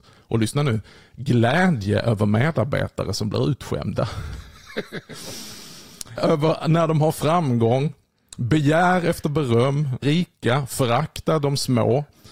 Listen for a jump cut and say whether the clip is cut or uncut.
cut